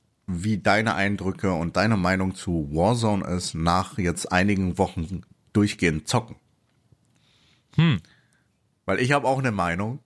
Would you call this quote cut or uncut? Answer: uncut